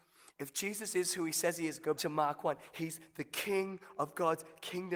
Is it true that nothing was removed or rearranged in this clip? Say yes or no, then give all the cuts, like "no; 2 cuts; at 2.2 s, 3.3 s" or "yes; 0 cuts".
no; 1 cut; at 2.0 s